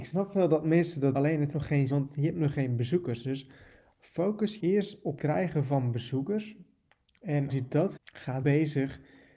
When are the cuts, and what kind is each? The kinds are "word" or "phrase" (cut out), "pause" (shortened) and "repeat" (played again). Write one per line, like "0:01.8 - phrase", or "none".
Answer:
0:01.1 - word
0:01.5 - word
0:01.9 - word
0:04.6 - word
0:05.2 - word
0:07.5 - word
0:08.0 - word
0:08.4 - word